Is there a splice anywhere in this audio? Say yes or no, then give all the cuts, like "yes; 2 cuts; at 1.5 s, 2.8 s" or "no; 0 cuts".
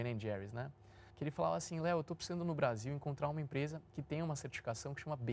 yes; 1 cut; at 1.1 s